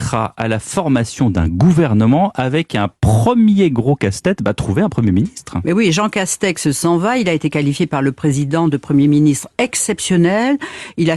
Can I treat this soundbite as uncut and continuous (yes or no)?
yes